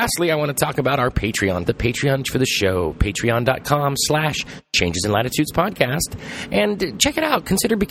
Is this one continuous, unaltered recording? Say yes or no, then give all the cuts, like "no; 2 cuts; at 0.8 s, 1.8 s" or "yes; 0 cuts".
no; 2 cuts; at 1.7 s, 2.2 s